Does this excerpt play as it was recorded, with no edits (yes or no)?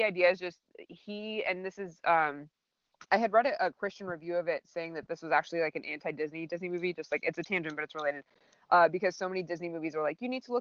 yes